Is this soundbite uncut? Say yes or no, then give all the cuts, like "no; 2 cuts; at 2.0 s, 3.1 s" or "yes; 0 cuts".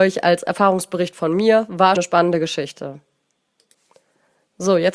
no; 1 cut; at 2.0 s